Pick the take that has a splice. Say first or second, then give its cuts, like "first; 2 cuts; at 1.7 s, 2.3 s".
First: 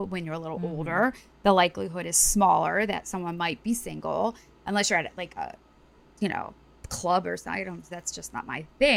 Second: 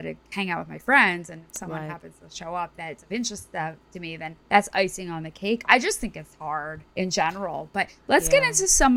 second; 2 cuts; at 4.4 s, 6.9 s